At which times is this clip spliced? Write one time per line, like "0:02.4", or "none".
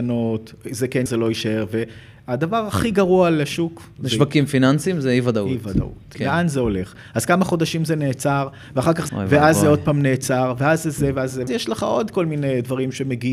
0:01.1
0:09.1
0:11.5